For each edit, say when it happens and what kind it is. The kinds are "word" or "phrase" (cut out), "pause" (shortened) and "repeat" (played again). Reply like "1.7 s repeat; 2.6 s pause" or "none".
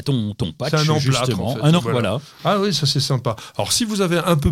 1.8 s word